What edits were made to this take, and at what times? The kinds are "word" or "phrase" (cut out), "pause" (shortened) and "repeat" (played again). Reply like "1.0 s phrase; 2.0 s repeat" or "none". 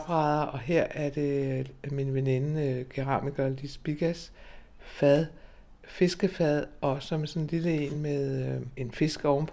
none